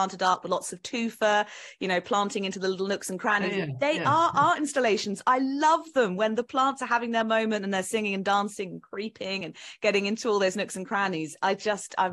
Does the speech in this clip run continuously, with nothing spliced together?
yes; 0 cuts

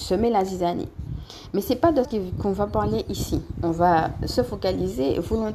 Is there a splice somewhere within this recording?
yes; 1 cut; at 2.0 s

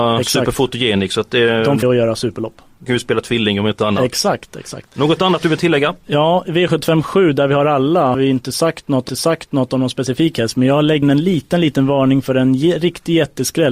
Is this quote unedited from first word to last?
no; 5 cuts; at 1.8 s, 2.9 s, 8.1 s, 9.1 s, 11.0 s

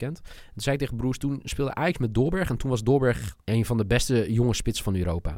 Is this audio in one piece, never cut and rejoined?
no; 1 cut; at 3.4 s

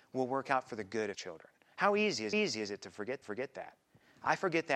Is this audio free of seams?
no; 3 cuts; at 1.1 s, 2.3 s, 3.2 s

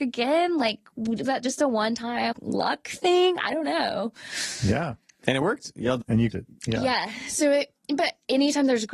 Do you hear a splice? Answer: yes; 4 cuts; at 1.2 s, 2.3 s, 6.0 s, 6.3 s

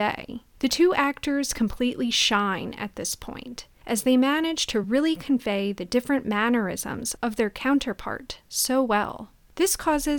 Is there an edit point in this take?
no; 0 cuts

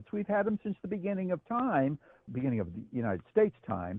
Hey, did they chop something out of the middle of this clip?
yes; 1 cut; at 2.3 s

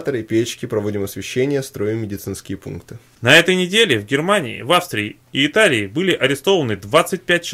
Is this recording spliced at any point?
yes; 1 cut; at 5.2 s

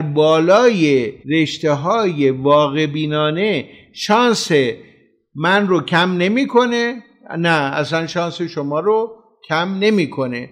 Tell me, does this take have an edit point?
yes; 1 cut; at 1.2 s

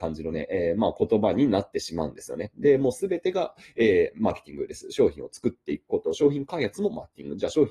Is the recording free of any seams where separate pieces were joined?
yes; 0 cuts

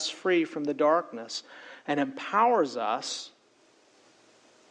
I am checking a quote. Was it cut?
no; 0 cuts

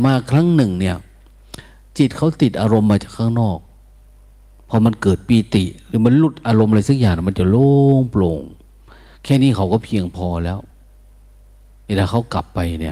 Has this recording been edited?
no; 0 cuts

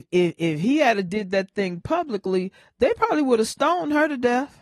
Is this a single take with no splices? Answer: yes; 0 cuts

